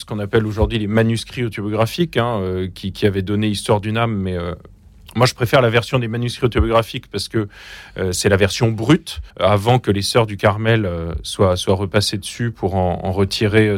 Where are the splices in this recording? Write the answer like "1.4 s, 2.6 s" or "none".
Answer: 9.3 s